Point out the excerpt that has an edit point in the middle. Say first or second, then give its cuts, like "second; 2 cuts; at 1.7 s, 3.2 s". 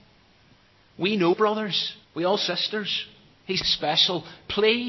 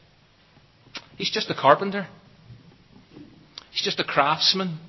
first; 4 cuts; at 1.3 s, 2.0 s, 2.5 s, 3.6 s